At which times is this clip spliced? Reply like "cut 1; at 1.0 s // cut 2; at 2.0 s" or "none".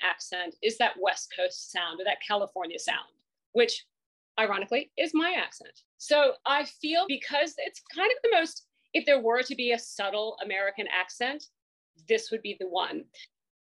cut 1; at 7.0 s